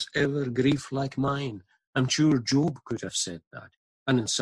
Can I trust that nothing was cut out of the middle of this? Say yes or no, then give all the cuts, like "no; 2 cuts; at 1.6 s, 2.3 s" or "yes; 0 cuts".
yes; 0 cuts